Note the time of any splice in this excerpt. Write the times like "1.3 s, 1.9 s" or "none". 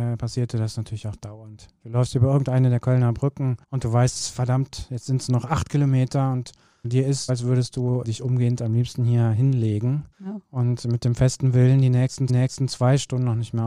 3.6 s, 6.8 s, 7.3 s, 8.0 s, 10.1 s, 12.3 s